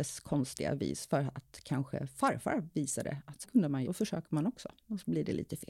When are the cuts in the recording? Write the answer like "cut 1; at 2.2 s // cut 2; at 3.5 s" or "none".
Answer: cut 1; at 3.4 s // cut 2; at 3.9 s

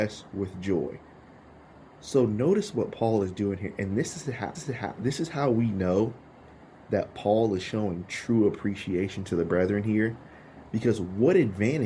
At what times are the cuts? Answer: cut 1; at 4.5 s

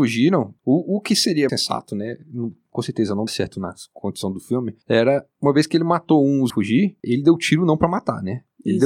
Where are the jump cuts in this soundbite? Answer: cut 1; at 1.5 s // cut 2; at 3.3 s // cut 3; at 6.5 s // cut 4; at 7.0 s

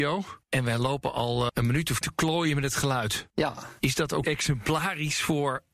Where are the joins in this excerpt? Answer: cut 1; at 1.5 s // cut 2; at 2.0 s // cut 3; at 4.2 s

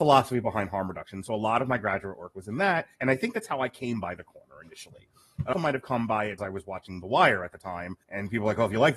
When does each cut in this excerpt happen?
cut 1; at 2.9 s // cut 2; at 5.5 s // cut 3; at 6.4 s // cut 4; at 8.0 s

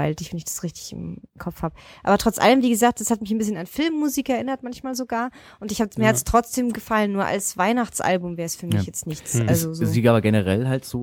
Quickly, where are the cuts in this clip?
cut 1; at 6.7 s

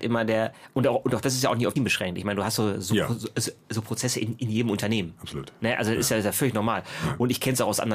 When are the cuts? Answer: cut 1; at 1.8 s

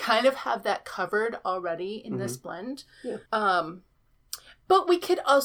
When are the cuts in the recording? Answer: cut 1; at 3.3 s

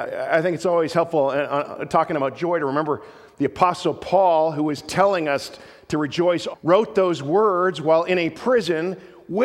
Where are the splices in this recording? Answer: cut 1; at 6.5 s

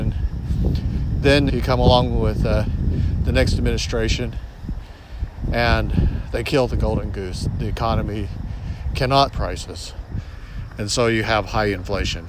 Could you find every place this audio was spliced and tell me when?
cut 1; at 1.5 s // cut 2; at 9.3 s

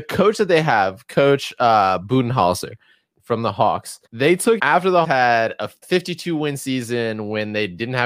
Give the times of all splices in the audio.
cut 1; at 3.1 s // cut 2; at 4.1 s // cut 3; at 4.6 s // cut 4; at 5.0 s // cut 5; at 5.8 s

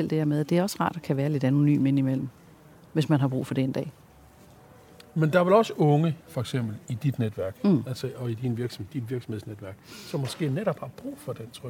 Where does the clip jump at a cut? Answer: none

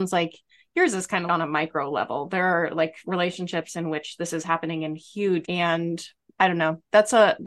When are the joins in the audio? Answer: cut 1; at 1.3 s // cut 2; at 5.4 s

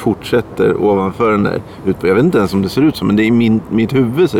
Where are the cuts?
none

